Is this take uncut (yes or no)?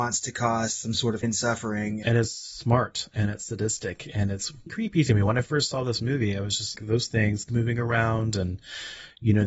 no